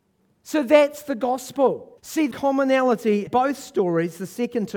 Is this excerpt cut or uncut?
cut